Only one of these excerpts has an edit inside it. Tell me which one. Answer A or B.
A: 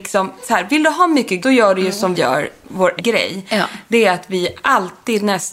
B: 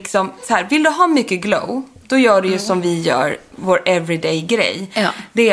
A